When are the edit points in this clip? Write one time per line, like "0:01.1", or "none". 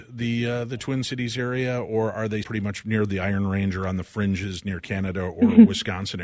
0:02.4